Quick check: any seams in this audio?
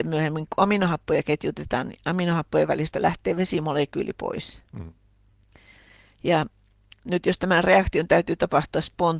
no; 0 cuts

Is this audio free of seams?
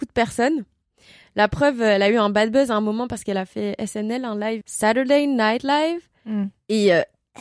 no; 1 cut; at 4.6 s

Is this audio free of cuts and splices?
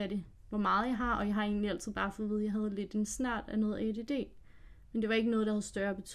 yes; 0 cuts

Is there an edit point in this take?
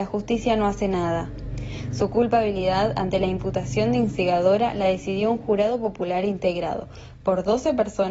no; 0 cuts

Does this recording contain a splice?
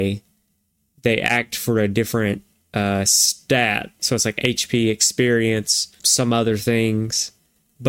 yes; 2 cuts; at 2.5 s, 6.0 s

